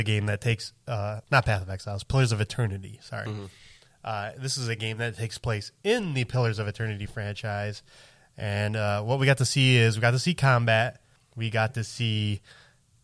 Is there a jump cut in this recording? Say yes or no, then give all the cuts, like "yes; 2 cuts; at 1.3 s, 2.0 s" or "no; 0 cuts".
yes; 2 cuts; at 1.2 s, 11.2 s